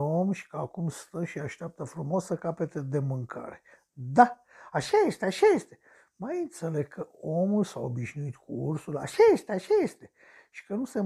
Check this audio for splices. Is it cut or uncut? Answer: uncut